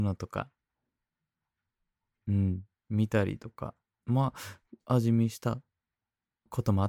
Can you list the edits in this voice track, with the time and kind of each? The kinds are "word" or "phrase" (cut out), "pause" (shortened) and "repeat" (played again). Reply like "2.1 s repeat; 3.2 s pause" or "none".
none